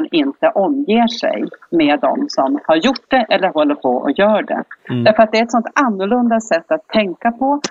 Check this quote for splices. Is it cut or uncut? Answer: cut